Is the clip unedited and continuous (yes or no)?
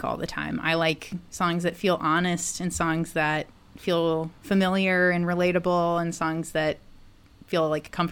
no